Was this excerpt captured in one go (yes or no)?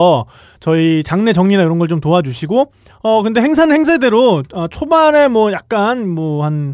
yes